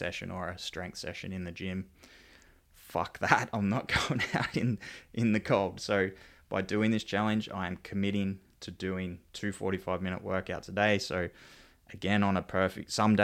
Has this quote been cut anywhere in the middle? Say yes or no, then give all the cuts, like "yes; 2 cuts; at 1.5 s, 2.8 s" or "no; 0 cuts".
no; 0 cuts